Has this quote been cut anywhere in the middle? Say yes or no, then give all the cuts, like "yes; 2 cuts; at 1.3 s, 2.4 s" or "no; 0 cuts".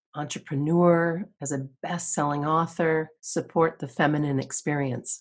yes; 1 cut; at 3.2 s